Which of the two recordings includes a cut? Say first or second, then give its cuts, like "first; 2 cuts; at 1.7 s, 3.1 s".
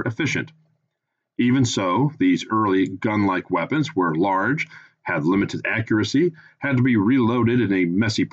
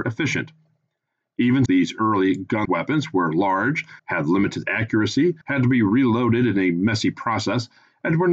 second; 4 cuts; at 1.7 s, 2.6 s, 4.0 s, 5.4 s